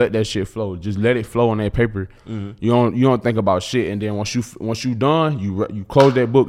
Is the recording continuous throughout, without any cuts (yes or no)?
yes